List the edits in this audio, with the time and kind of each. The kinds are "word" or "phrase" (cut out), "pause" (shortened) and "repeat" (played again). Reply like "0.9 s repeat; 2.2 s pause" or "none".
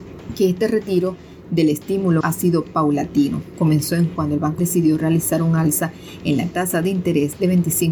2.2 s word; 4.2 s word; 4.6 s word